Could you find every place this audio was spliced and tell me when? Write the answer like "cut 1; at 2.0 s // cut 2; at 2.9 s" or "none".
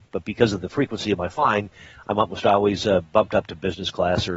none

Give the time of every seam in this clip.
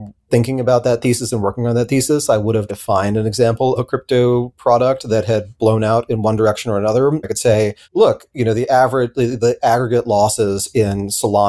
cut 1; at 2.7 s // cut 2; at 3.8 s // cut 3; at 7.2 s // cut 4; at 7.8 s

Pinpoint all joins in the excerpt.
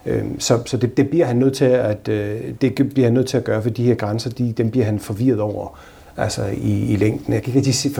cut 1; at 2.6 s

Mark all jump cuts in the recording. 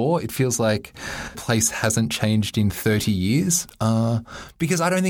cut 1; at 1.3 s

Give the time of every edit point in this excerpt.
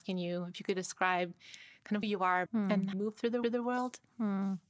cut 1; at 2.0 s // cut 2; at 2.5 s // cut 3; at 2.9 s // cut 4; at 3.4 s

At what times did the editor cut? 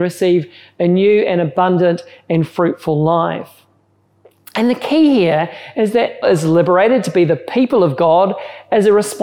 cut 1; at 6.2 s

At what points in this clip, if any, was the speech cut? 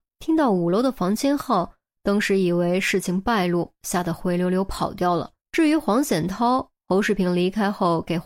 cut 1; at 5.4 s

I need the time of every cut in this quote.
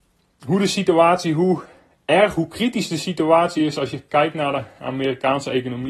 none

